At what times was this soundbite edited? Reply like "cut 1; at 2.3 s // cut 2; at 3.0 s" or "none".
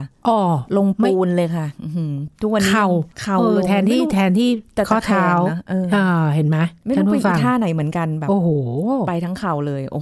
cut 1; at 3.1 s